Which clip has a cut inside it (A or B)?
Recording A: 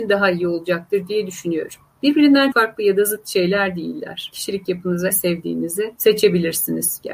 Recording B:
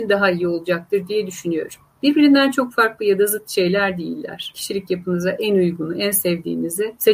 A